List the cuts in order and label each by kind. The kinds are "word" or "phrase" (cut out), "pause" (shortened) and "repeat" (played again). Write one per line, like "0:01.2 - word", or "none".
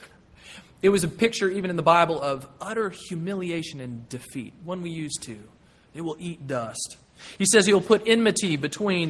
none